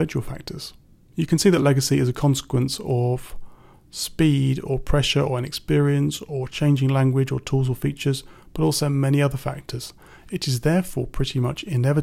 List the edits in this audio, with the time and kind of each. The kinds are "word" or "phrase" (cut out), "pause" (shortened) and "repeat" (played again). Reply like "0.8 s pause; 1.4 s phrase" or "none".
none